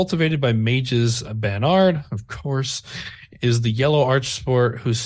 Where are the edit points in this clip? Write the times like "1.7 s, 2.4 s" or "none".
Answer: 1.2 s